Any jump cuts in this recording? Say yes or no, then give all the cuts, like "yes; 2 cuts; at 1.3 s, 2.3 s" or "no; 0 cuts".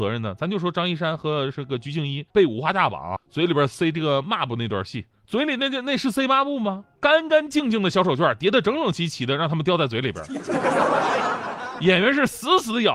yes; 4 cuts; at 2.3 s, 3.2 s, 5.1 s, 7.0 s